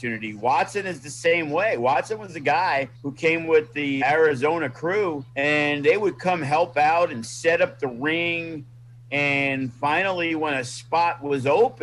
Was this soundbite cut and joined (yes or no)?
yes